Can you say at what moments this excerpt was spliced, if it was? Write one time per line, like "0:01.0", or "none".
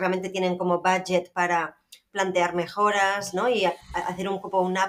none